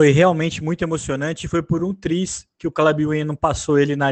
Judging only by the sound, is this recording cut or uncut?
uncut